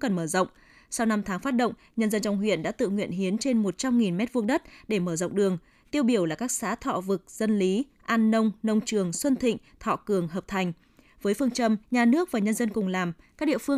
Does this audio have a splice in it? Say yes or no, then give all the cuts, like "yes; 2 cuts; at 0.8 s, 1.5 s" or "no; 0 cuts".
yes; 1 cut; at 11.8 s